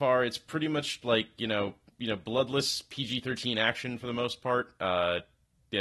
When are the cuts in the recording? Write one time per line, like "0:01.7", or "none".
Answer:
0:01.0
0:01.9